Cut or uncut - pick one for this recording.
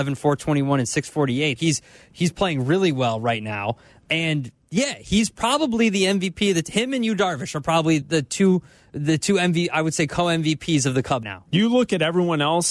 cut